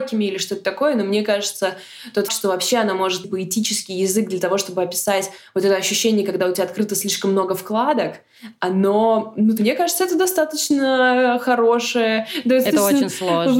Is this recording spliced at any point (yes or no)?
yes